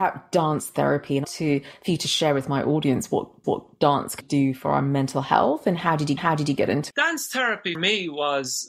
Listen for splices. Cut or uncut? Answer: cut